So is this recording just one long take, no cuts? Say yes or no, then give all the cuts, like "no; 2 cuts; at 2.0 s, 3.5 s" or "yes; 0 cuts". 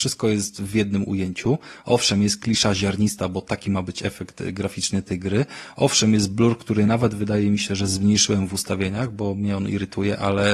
yes; 0 cuts